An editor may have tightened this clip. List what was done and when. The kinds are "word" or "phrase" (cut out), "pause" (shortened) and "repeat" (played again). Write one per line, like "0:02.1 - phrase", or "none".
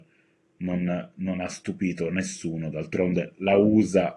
none